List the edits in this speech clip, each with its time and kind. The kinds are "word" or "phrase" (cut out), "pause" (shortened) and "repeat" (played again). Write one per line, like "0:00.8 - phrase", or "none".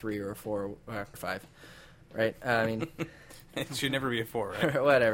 0:01.1 - word